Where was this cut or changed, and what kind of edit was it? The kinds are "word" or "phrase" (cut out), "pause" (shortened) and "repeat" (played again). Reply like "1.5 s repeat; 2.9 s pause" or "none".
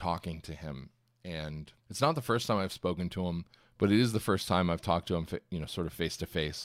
1.8 s pause; 3.6 s pause